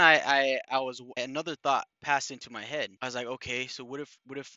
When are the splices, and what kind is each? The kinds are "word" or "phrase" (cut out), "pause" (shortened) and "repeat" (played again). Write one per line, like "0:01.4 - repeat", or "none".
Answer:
0:01.2 - word
0:01.9 - pause
0:03.0 - pause

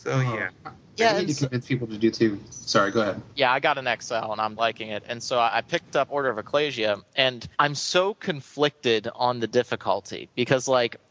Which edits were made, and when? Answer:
0:02.1 - word
0:03.3 - pause
0:04.6 - word
0:06.1 - word
0:07.5 - pause

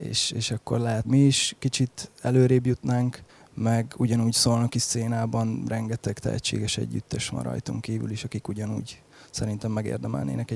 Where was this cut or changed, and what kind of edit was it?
0:01.0 - phrase
0:03.3 - pause

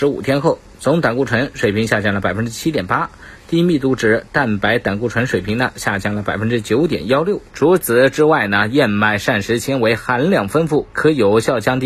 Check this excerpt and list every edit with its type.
0:07.5 - pause
0:10.9 - phrase

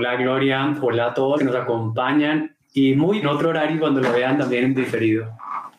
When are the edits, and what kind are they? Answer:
0:01.4 - word
0:02.6 - phrase
0:03.2 - phrase

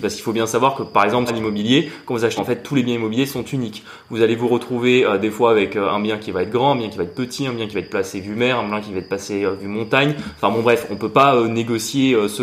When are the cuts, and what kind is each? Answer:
0:01.3 - phrase
0:02.4 - phrase

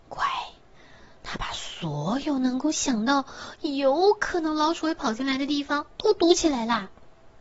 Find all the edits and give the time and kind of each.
0:05.9 - pause

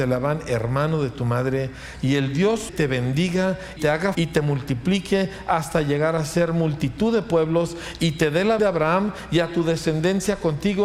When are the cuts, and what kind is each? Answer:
0:02.7 - word
0:03.8 - word
0:04.1 - word
0:08.6 - word

